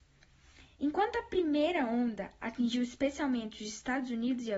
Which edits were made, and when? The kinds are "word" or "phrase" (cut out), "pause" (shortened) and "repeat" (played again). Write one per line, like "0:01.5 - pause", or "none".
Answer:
none